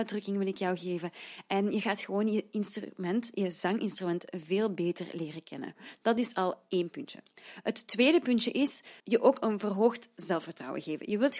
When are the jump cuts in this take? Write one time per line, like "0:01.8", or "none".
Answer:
0:09.0